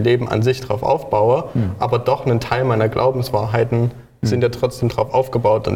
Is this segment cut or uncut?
uncut